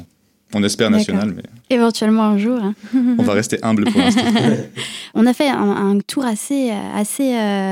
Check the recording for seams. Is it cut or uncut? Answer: cut